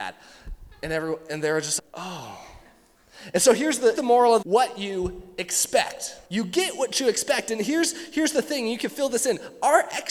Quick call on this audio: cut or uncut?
cut